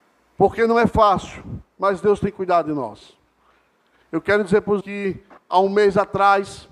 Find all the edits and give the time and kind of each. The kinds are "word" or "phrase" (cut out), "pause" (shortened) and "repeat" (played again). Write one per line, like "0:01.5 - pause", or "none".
0:04.8 - word
0:05.4 - pause